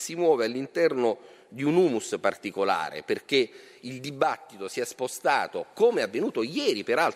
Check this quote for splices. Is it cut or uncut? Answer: uncut